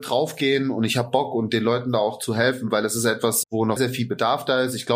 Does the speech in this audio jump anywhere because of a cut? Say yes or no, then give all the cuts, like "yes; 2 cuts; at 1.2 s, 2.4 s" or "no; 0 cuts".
yes; 2 cuts; at 3.4 s, 3.8 s